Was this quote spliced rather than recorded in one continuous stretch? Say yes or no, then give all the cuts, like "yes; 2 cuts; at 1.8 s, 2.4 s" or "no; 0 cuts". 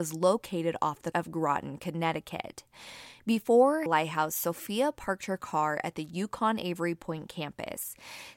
yes; 2 cuts; at 1.1 s, 3.9 s